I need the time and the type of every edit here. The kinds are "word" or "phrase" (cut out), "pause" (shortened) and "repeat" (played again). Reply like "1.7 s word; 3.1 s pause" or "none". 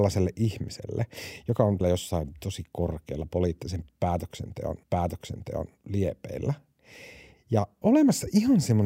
1.8 s word; 4.8 s repeat; 7.8 s word